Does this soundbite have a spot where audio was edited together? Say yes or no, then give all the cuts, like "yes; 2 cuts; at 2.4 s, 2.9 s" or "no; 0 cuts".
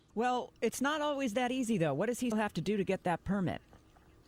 yes; 1 cut; at 2.3 s